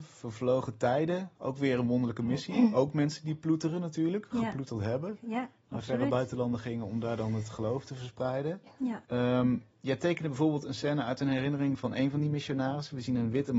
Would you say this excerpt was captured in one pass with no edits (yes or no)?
no